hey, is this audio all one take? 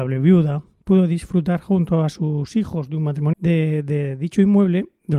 no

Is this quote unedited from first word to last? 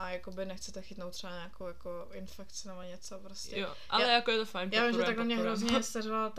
yes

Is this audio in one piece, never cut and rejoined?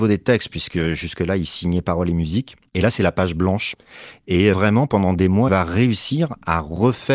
no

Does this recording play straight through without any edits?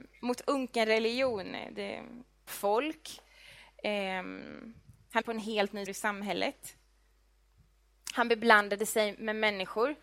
no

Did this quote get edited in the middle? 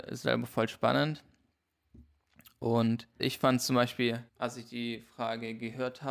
yes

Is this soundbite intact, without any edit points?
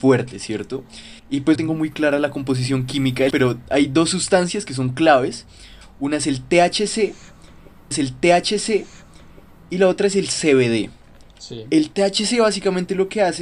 no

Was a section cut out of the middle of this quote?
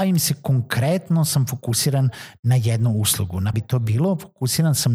yes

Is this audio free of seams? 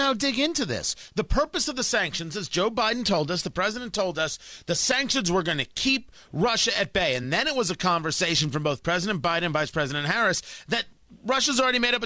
yes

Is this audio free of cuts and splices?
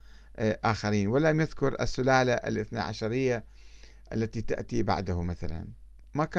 yes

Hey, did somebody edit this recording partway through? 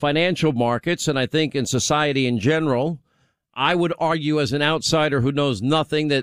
no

